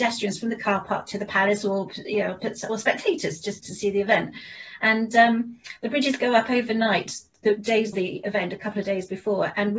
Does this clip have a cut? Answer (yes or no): yes